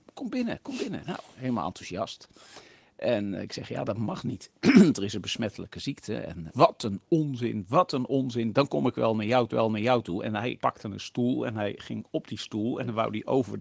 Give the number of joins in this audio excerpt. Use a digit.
3